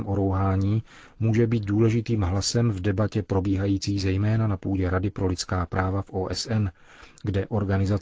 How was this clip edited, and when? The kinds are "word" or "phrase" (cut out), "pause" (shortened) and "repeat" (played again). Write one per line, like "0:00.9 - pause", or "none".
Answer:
none